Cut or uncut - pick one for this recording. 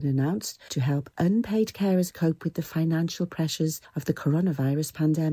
cut